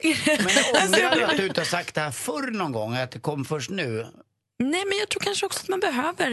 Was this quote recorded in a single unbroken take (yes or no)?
yes